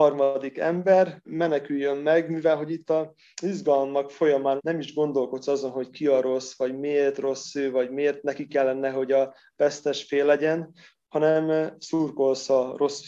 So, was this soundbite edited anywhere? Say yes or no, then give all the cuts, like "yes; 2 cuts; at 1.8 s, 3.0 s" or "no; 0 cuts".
no; 0 cuts